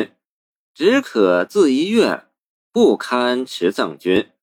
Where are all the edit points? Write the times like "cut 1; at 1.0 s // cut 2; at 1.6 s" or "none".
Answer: none